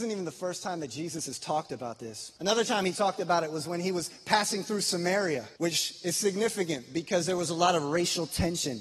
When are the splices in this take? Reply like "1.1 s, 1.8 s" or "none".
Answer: 2.4 s, 5.6 s